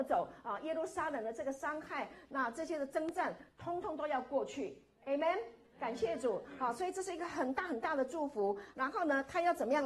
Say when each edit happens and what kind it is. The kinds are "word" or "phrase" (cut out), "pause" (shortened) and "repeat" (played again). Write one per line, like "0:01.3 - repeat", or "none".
0:08.7 - word